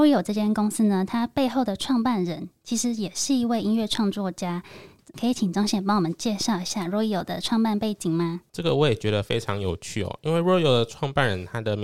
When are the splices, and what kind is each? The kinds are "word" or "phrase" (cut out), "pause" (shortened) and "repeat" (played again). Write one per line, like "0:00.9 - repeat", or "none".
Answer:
0:08.5 - pause